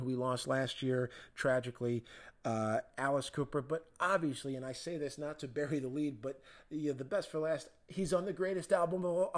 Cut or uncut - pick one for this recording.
uncut